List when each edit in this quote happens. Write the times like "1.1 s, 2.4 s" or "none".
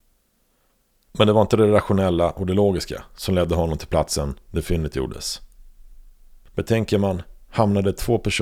none